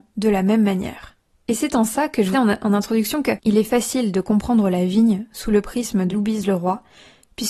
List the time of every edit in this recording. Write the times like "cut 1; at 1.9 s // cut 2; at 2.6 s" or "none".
cut 1; at 2.3 s // cut 2; at 6.1 s